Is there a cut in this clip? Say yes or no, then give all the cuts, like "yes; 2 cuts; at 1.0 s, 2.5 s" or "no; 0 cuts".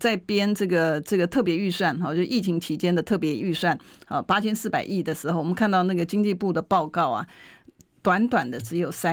no; 0 cuts